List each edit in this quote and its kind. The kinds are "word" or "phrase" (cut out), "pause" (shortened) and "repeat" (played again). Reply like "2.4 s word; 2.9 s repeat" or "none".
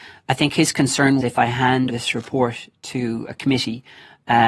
1.2 s word; 1.9 s word